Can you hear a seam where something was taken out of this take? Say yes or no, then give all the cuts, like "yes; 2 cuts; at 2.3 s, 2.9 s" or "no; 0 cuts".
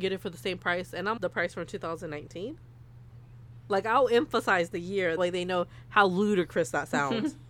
yes; 2 cuts; at 1.2 s, 5.2 s